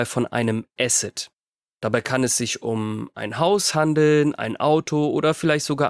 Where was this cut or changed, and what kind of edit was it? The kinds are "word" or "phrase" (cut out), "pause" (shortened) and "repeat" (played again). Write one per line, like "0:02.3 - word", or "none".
none